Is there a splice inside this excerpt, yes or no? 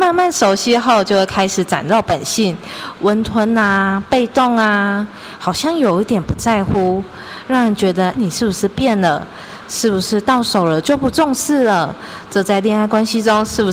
yes